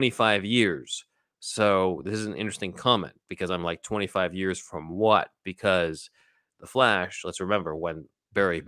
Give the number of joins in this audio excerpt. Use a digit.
0